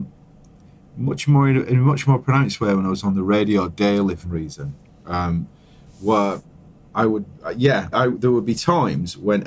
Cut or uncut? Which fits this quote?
cut